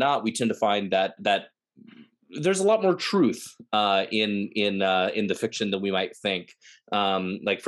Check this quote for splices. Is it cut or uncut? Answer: cut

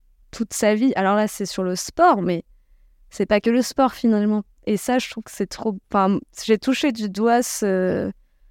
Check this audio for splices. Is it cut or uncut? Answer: uncut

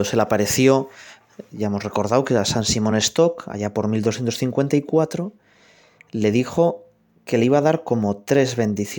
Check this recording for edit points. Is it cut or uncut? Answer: uncut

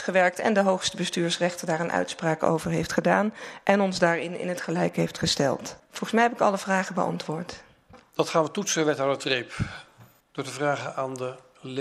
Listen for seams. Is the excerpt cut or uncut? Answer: uncut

